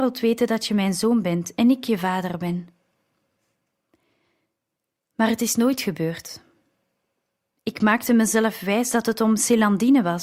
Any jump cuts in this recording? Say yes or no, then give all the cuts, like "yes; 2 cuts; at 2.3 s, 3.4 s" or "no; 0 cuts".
no; 0 cuts